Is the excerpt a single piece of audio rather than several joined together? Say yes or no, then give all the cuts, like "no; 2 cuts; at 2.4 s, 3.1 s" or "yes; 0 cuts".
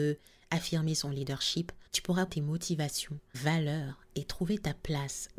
no; 3 cuts; at 1.9 s, 2.3 s, 3.3 s